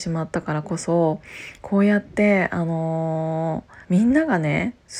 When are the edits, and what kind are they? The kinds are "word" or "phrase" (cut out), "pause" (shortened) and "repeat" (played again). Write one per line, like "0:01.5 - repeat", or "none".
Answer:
0:03.8 - pause